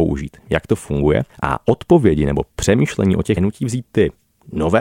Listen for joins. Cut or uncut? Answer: cut